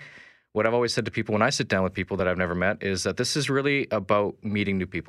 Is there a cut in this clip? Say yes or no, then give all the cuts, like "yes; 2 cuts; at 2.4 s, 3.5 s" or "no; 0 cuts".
no; 0 cuts